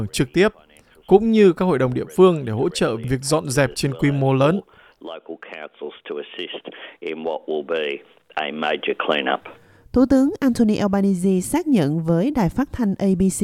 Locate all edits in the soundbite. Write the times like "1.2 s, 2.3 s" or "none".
none